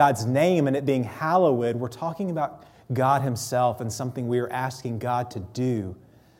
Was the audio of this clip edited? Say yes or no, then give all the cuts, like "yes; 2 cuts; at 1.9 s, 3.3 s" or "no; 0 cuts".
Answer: no; 0 cuts